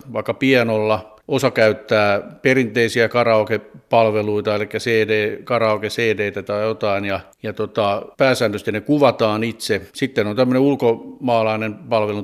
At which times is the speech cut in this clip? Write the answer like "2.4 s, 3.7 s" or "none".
1.2 s, 7.3 s, 8.1 s, 9.9 s